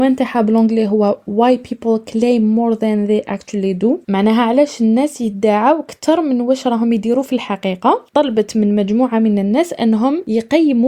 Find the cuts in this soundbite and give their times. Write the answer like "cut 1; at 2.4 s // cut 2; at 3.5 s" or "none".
none

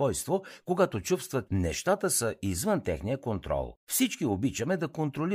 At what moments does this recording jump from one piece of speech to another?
cut 1; at 1.5 s // cut 2; at 3.8 s

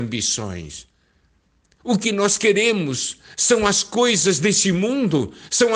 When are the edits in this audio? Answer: none

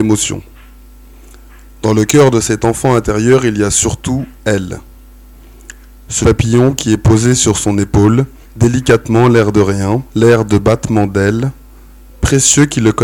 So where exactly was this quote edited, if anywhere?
cut 1; at 6.2 s // cut 2; at 8.4 s // cut 3; at 10.1 s

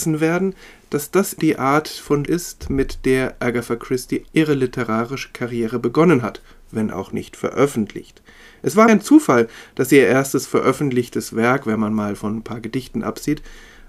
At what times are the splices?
cut 1; at 1.4 s // cut 2; at 2.3 s // cut 3; at 4.3 s // cut 4; at 8.9 s

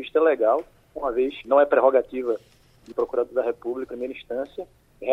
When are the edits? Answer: cut 1; at 1.4 s // cut 2; at 2.9 s // cut 3; at 3.9 s

